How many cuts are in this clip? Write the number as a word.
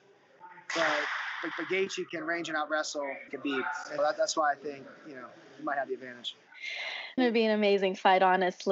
four